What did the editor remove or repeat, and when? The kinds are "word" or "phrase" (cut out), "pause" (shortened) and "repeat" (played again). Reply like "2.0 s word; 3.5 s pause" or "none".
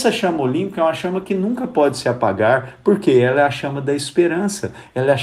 none